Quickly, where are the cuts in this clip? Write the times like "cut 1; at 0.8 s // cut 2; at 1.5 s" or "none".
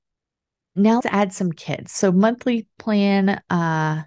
cut 1; at 1.0 s